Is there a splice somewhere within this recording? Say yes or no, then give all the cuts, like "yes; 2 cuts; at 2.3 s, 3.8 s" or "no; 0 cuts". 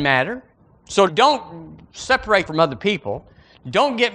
yes; 2 cuts; at 1.1 s, 2.5 s